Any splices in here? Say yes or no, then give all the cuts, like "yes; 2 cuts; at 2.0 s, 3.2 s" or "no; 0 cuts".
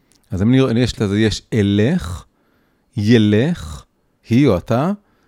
yes; 2 cuts; at 1.0 s, 4.2 s